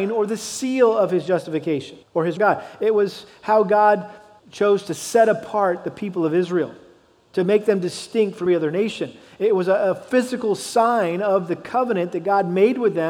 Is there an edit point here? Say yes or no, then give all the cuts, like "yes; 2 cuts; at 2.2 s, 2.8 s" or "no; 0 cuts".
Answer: yes; 4 cuts; at 2.0 s, 2.4 s, 4.4 s, 8.5 s